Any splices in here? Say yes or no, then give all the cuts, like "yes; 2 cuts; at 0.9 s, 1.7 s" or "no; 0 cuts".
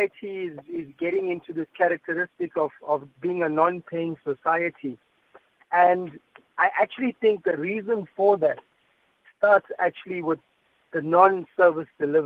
no; 0 cuts